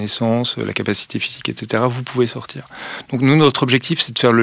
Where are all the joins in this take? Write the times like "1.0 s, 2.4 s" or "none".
none